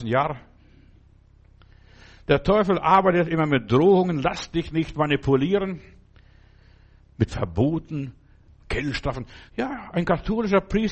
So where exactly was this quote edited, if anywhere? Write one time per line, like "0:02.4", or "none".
0:09.5